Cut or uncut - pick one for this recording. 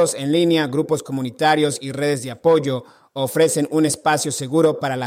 uncut